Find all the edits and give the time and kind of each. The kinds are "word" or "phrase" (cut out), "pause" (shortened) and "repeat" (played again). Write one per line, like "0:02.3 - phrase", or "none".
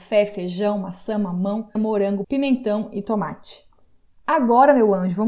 0:01.8 - word
0:02.2 - word

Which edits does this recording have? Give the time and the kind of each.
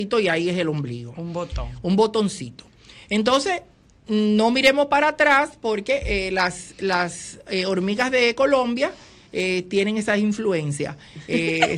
none

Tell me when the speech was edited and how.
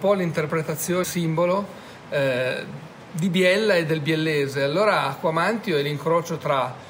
0:01.0 - word

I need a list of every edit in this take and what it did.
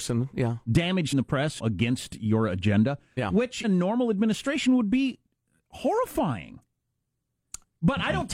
0:01.1 - word
0:01.6 - phrase
0:03.6 - word

